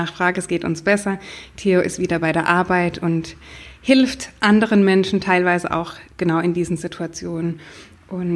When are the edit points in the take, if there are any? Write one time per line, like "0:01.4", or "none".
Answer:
none